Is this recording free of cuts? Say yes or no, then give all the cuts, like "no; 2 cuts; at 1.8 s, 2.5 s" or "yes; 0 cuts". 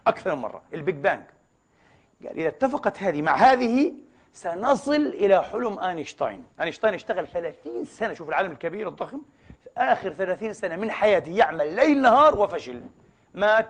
no; 1 cut; at 6.5 s